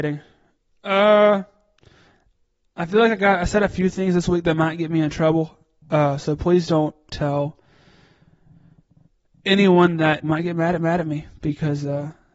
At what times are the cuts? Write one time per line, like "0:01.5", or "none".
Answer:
0:07.1
0:10.2
0:10.8